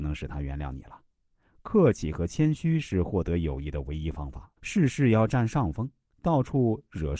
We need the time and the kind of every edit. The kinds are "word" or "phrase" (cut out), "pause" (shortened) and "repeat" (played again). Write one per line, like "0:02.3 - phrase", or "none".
0:04.6 - pause

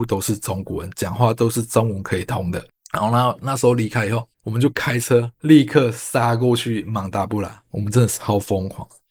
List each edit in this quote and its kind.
0:02.7 - pause
0:04.3 - pause
0:05.3 - pause

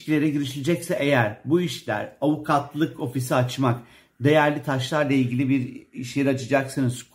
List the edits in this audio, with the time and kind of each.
none

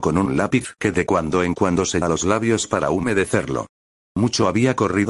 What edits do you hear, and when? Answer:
0:02.0 - word

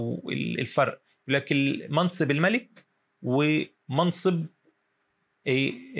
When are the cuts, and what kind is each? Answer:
none

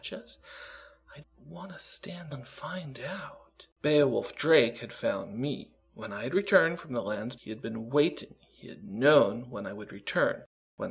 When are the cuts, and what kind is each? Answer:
0:01.2 - word
0:02.3 - word
0:03.7 - pause
0:07.4 - word

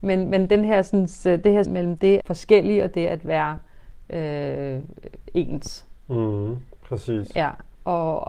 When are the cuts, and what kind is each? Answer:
0:01.6 - word
0:02.2 - phrase

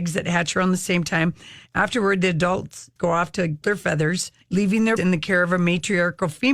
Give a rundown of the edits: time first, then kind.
0:03.0 - word
0:03.6 - word
0:04.4 - pause
0:05.0 - word

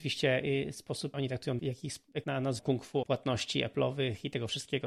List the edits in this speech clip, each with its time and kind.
0:01.1 - word
0:01.6 - word
0:02.2 - word
0:02.6 - word
0:03.0 - word

